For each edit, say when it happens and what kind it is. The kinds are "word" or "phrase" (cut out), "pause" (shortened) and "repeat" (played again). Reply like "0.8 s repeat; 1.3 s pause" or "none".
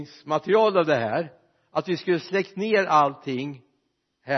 none